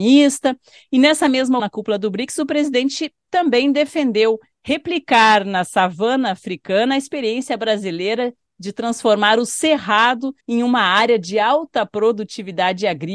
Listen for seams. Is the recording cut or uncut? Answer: cut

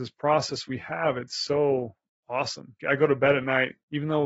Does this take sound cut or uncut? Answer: cut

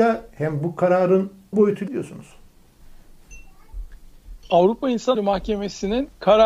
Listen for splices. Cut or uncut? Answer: cut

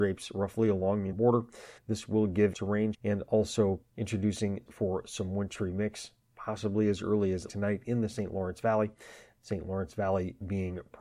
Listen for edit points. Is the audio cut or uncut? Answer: cut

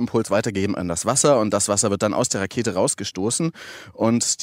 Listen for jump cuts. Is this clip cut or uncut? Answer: uncut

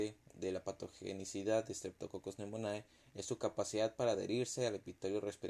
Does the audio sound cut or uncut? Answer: uncut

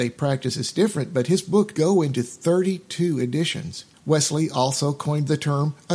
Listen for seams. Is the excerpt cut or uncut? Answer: cut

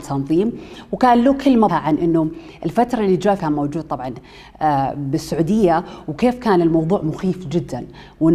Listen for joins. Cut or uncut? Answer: cut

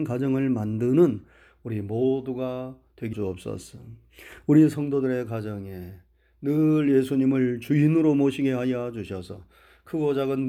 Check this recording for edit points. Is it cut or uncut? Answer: cut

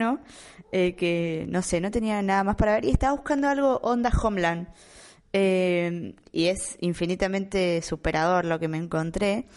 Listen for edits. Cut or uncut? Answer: uncut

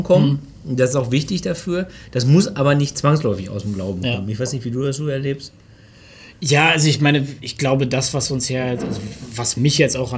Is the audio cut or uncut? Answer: uncut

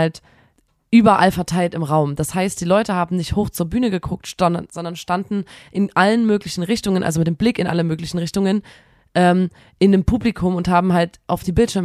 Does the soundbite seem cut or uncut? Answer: uncut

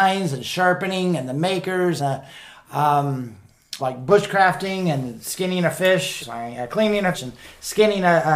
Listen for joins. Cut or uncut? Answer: cut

